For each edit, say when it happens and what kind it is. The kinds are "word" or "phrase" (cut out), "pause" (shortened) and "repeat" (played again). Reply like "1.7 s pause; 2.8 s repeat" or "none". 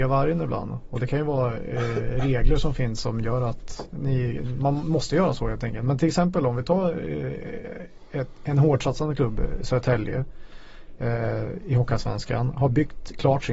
none